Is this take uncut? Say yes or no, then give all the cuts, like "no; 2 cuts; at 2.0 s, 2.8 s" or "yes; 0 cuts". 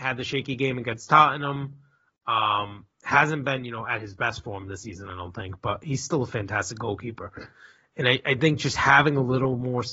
yes; 0 cuts